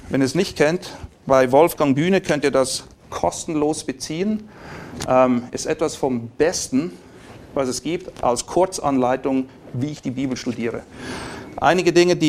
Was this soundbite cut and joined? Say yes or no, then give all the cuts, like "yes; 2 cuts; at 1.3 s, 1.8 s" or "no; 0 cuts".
no; 0 cuts